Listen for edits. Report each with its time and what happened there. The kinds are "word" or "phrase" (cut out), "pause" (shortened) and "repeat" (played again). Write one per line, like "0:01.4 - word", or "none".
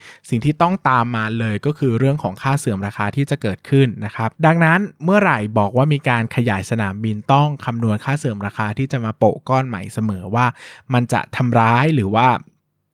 0:04.4 - pause